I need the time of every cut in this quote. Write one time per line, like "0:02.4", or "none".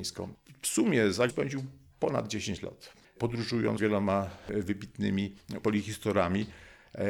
0:01.3
0:03.8
0:05.6